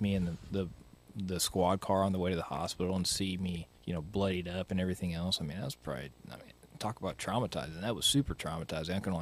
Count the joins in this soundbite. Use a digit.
1